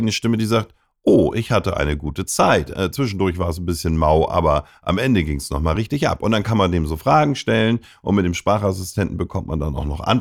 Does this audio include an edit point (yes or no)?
no